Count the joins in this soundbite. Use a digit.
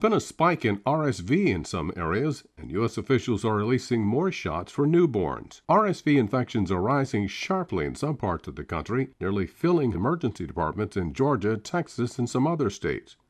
3